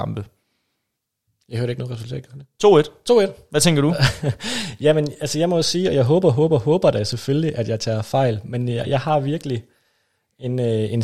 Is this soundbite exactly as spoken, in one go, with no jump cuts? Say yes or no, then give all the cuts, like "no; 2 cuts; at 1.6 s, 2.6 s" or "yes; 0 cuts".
yes; 0 cuts